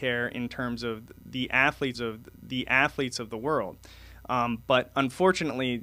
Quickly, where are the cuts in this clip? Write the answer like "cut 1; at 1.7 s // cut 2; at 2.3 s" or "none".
cut 1; at 1.9 s